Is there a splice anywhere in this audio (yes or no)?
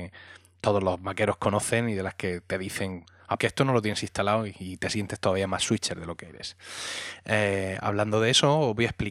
yes